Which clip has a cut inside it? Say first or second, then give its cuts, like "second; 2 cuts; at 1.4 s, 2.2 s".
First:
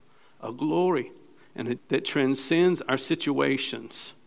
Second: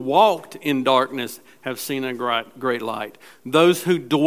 first; 1 cut; at 1.8 s